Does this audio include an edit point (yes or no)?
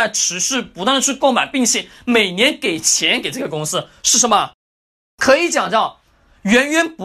no